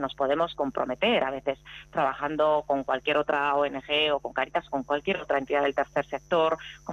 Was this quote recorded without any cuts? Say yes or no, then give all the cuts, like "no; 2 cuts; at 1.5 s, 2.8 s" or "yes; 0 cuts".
yes; 0 cuts